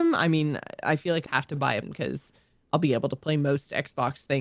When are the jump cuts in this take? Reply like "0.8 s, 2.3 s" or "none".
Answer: 1.3 s, 1.8 s